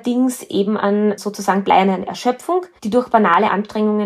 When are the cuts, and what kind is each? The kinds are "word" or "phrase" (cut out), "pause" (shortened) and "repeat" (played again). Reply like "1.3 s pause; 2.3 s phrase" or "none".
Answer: 2.8 s pause